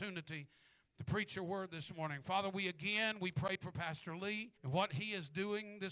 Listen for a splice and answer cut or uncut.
cut